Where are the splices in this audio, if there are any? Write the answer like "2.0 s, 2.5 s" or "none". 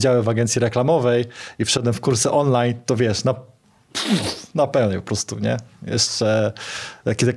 none